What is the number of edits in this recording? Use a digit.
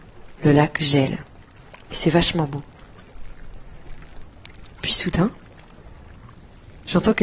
1